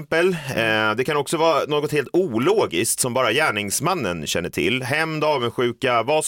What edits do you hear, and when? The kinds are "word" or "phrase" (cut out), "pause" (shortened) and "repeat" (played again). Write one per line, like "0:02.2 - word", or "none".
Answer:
none